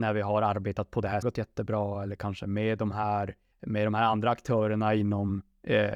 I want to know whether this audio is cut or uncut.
cut